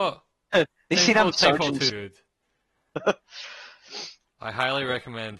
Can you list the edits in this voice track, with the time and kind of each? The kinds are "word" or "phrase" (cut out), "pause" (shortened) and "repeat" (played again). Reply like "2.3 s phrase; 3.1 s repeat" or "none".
1.3 s word; 1.9 s word